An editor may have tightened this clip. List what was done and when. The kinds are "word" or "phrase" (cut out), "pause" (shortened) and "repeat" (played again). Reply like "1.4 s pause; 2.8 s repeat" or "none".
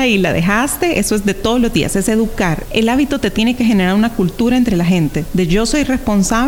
2.7 s word